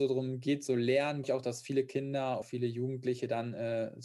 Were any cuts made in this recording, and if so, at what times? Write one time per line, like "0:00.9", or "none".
0:01.2
0:02.4